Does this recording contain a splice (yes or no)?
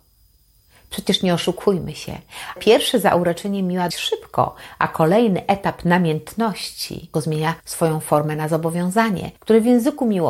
yes